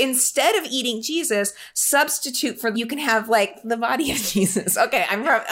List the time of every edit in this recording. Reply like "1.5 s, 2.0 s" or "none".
2.7 s

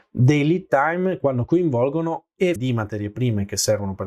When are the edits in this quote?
2.6 s

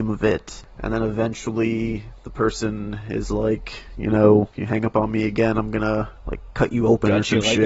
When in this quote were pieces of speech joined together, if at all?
none

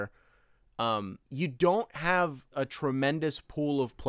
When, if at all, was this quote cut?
1.3 s, 2.5 s

